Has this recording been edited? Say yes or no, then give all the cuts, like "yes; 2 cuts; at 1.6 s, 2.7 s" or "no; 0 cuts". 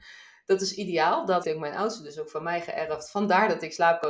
yes; 1 cut; at 1.4 s